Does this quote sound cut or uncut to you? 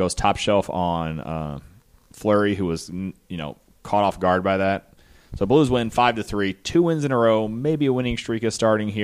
uncut